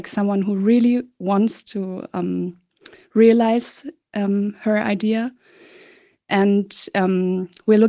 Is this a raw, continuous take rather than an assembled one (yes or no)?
yes